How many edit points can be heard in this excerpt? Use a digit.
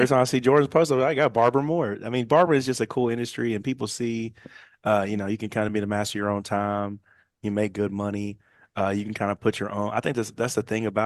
0